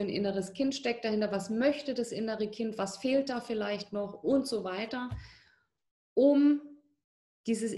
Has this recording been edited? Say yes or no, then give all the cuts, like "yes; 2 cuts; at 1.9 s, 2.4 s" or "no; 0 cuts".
no; 0 cuts